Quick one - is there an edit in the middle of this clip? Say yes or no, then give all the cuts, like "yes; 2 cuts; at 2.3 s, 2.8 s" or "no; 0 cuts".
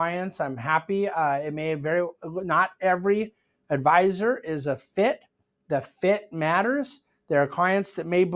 no; 0 cuts